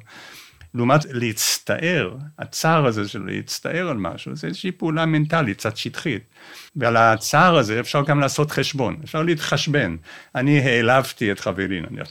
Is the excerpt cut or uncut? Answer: cut